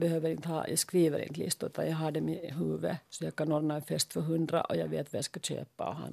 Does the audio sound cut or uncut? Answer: uncut